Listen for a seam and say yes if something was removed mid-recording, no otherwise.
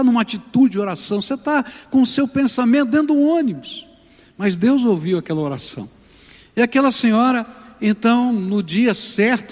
no